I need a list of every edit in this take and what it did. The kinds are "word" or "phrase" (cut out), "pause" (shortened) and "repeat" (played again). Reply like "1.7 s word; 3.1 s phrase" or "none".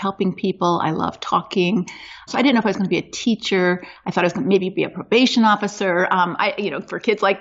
none